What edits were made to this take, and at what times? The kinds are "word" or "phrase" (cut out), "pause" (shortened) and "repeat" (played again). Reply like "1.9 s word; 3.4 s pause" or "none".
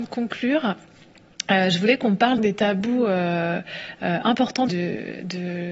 2.4 s word; 4.7 s word